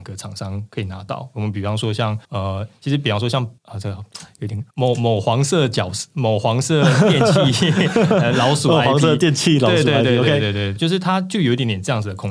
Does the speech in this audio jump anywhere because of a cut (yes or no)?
yes